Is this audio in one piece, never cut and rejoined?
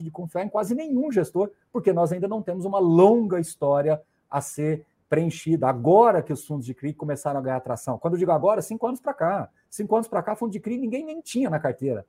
yes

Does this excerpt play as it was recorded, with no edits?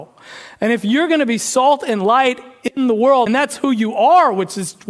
no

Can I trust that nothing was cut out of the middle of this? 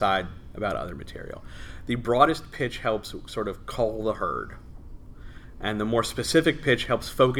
yes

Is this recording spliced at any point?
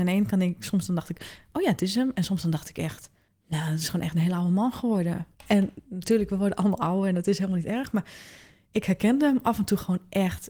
yes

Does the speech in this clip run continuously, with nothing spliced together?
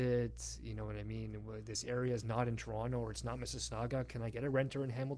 yes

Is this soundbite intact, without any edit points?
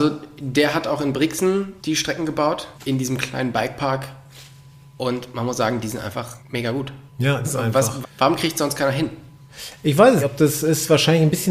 no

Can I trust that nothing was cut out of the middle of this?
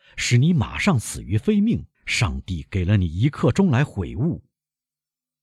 no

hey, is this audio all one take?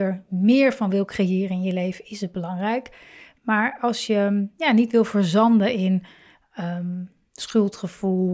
yes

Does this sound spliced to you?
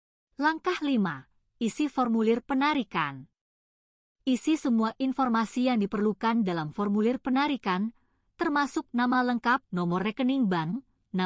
yes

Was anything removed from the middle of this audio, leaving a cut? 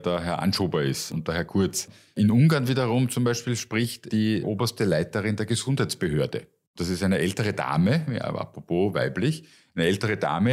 no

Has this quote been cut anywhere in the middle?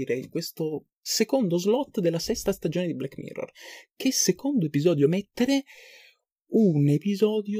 no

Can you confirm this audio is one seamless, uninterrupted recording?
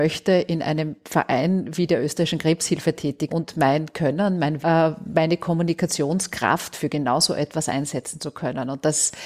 no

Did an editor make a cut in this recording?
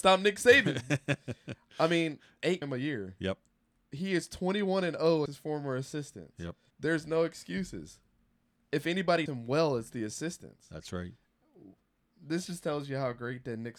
yes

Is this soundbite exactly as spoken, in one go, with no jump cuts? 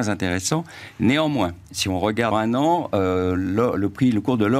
no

